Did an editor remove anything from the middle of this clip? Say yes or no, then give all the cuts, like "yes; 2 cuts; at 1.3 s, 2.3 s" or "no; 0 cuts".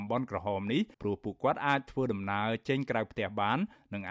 yes; 1 cut; at 0.9 s